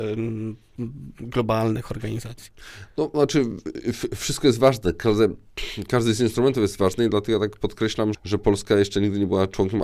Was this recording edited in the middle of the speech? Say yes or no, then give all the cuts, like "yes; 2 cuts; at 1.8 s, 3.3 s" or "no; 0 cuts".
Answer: yes; 1 cut; at 8.1 s